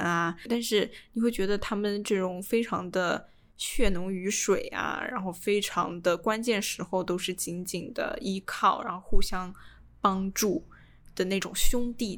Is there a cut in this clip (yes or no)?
no